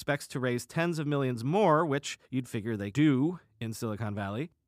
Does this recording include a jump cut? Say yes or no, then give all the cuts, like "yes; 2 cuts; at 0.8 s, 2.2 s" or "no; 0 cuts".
yes; 2 cuts; at 2.2 s, 2.9 s